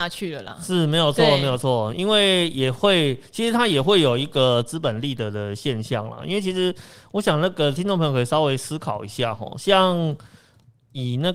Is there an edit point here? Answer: no; 0 cuts

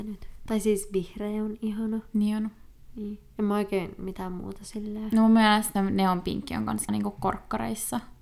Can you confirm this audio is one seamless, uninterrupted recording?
no; 2 cuts; at 5.7 s, 6.9 s

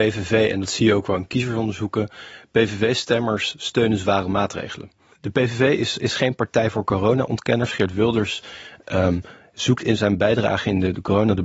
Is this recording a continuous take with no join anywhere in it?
yes; 0 cuts

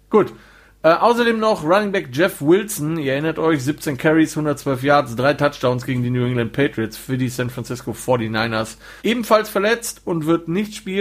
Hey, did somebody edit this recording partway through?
yes; 1 cut; at 9.0 s

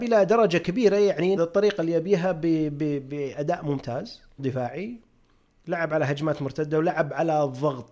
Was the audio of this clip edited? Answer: yes; 2 cuts; at 1.4 s, 4.4 s

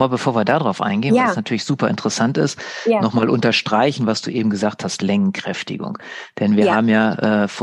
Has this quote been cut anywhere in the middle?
no; 0 cuts

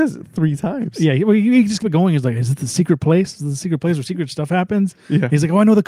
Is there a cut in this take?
yes; 1 cut; at 1.8 s

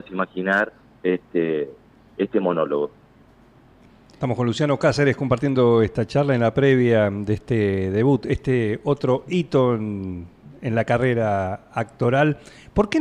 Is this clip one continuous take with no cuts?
yes; 0 cuts

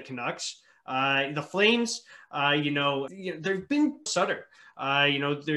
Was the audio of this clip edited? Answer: yes; 2 cuts; at 3.1 s, 4.1 s

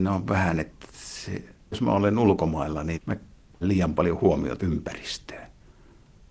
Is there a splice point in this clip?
yes; 4 cuts; at 1.7 s, 2.9 s, 3.6 s, 4.6 s

